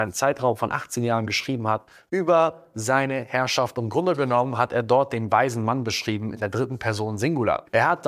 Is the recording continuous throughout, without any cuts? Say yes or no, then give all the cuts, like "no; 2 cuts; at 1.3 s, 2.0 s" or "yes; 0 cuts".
yes; 0 cuts